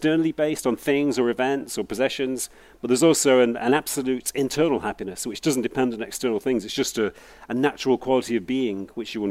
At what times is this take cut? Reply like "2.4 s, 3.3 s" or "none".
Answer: none